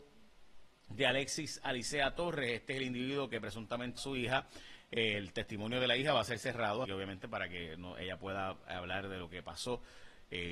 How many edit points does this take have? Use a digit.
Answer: 2